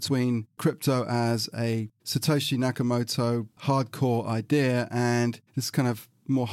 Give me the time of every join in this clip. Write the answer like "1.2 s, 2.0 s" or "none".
3.5 s, 5.5 s